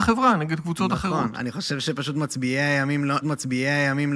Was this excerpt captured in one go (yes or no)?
no